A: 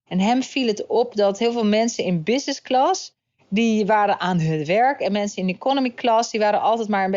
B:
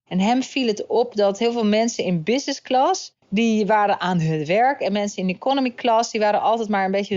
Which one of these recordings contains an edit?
B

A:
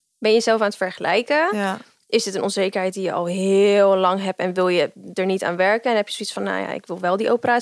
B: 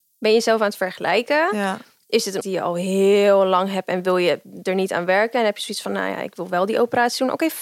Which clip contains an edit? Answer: B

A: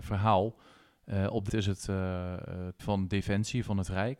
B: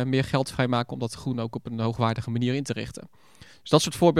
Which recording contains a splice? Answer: A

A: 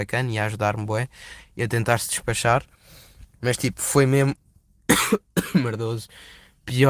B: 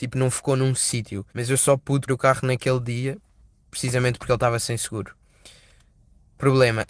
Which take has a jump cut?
B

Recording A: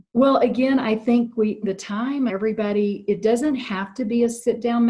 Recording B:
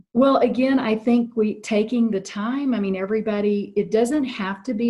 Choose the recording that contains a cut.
A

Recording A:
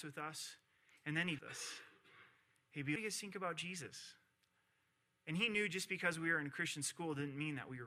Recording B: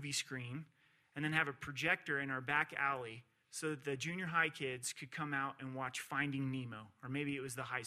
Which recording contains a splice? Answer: A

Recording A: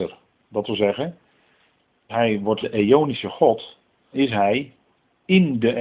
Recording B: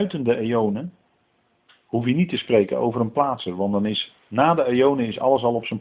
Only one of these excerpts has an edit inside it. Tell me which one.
A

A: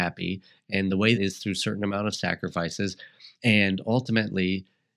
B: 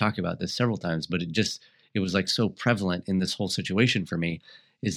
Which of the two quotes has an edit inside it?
A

